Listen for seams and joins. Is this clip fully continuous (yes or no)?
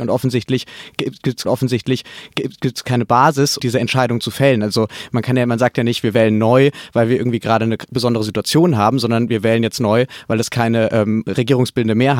no